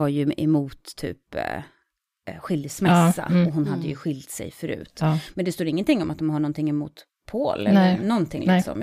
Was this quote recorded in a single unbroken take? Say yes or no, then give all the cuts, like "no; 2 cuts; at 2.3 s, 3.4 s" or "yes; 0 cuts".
yes; 0 cuts